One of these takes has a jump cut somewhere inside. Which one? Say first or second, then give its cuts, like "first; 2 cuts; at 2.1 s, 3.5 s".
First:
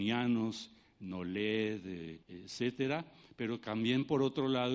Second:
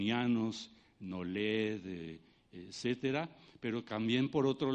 first; 1 cut; at 2.2 s